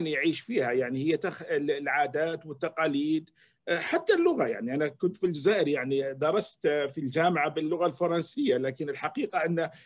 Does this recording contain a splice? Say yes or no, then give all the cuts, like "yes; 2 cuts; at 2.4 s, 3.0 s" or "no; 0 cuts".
no; 0 cuts